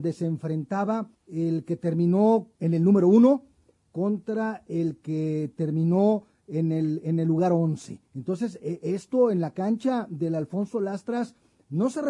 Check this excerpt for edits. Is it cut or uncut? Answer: cut